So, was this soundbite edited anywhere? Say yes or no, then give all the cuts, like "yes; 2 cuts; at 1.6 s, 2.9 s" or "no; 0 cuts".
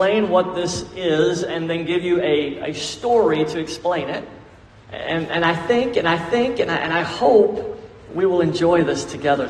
yes; 2 cuts; at 4.6 s, 6.0 s